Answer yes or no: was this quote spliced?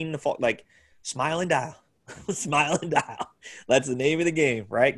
no